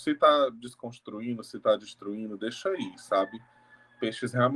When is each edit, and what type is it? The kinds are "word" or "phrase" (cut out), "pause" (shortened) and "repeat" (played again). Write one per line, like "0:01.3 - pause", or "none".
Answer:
none